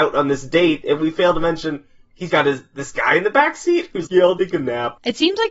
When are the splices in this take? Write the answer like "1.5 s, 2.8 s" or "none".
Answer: 1.0 s, 2.3 s, 4.1 s, 4.4 s